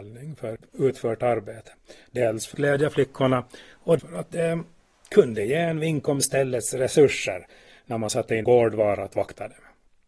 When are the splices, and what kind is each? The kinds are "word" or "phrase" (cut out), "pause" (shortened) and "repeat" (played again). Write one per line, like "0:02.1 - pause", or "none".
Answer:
0:02.5 - word
0:04.0 - word
0:08.4 - word